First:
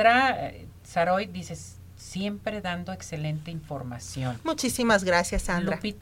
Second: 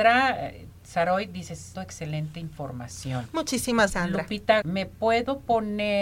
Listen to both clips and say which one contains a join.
second; 3 cuts; at 1.7 s, 3.9 s, 4.6 s

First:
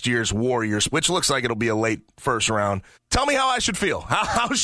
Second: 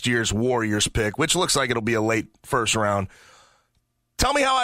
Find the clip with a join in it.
first; 2 cuts; at 0.9 s, 2.9 s

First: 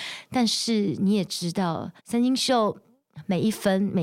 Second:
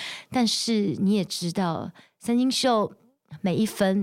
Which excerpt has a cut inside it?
first; 1 cut; at 2.0 s

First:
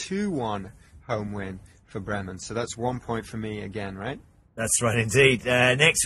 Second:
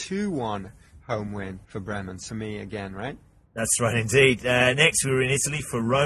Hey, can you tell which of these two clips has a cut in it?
second; 2 cuts; at 1.6 s, 2.3 s

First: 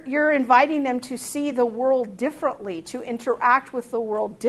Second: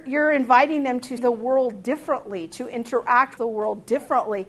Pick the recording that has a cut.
second; 2 cuts; at 1.2 s, 3.4 s

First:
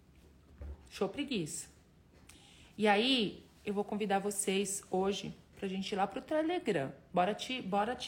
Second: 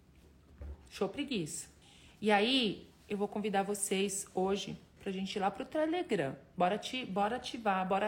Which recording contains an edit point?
second; 1 cut; at 1.8 s

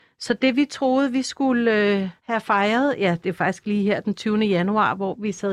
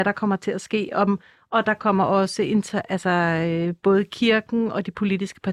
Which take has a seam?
first; 1 cut; at 2.2 s

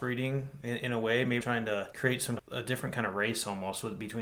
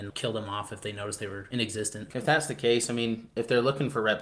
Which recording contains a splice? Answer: first; 2 cuts; at 1.4 s, 2.4 s

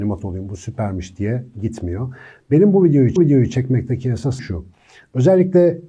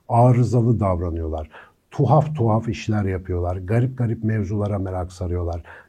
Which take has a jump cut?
first; 3 cuts; at 1.5 s, 3.2 s, 4.4 s

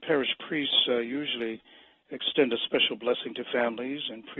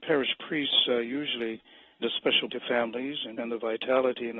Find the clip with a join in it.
second; 3 cuts; at 2.0 s, 2.5 s, 3.4 s

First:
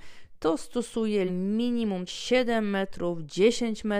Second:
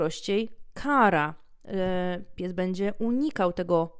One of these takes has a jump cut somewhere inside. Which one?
first; 2 cuts; at 1.3 s, 2.1 s

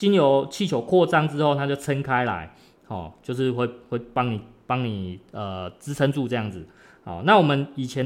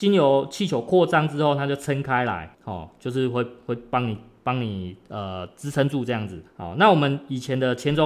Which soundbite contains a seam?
second; 2 cuts; at 2.5 s, 6.5 s

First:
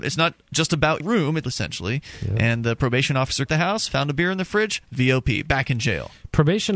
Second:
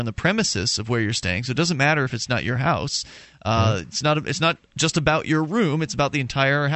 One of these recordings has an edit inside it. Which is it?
first; 3 cuts; at 1.0 s, 1.4 s, 3.5 s

